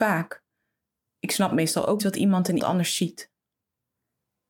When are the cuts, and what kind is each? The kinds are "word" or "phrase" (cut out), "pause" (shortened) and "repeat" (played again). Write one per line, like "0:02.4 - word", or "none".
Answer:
0:02.0 - word
0:02.6 - word